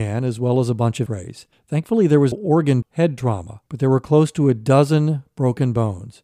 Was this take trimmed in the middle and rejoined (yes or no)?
yes